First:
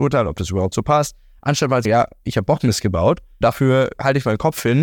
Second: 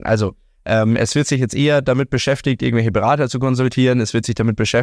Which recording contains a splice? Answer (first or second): first